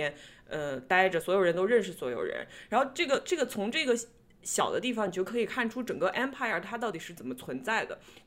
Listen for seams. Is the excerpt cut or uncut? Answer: uncut